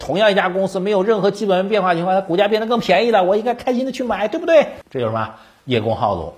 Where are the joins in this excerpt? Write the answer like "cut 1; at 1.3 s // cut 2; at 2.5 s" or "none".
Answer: none